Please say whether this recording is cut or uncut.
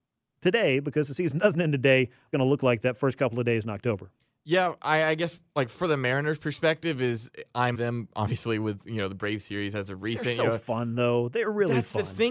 cut